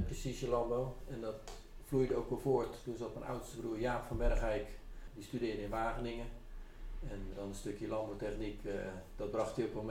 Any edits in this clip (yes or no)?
yes